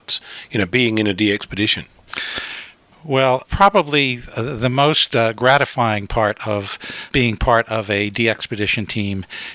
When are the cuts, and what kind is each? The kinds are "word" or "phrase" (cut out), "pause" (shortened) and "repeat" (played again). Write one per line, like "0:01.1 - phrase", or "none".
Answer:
0:03.5 - word
0:07.1 - word